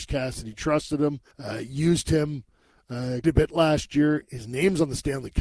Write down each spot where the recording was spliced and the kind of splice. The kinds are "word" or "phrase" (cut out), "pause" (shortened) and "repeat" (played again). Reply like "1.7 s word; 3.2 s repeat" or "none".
1.3 s pause; 3.2 s word